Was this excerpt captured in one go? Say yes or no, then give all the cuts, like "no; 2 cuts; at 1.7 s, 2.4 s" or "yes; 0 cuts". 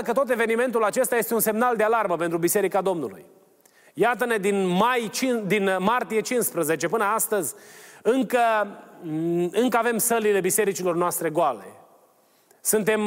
yes; 0 cuts